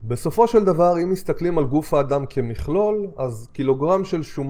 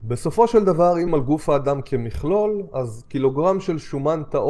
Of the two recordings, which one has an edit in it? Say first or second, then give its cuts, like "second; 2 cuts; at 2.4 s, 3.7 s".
second; 1 cut; at 1.1 s